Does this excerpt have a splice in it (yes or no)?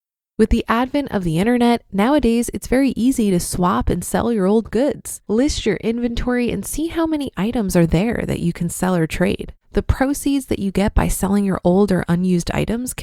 yes